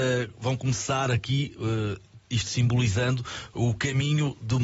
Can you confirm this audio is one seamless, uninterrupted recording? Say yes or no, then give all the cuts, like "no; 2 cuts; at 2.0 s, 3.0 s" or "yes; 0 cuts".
no; 1 cut; at 2.2 s